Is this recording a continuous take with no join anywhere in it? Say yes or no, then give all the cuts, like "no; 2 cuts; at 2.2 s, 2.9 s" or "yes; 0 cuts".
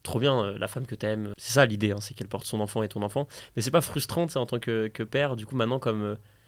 yes; 0 cuts